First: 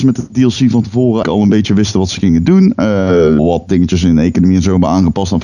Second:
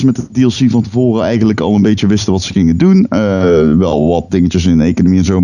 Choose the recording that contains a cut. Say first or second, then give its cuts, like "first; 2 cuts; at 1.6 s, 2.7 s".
first; 2 cuts; at 1.2 s, 3.4 s